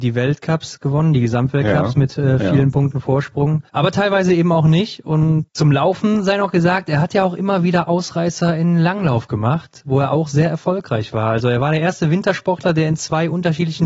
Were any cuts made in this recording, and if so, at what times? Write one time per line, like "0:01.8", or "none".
0:03.7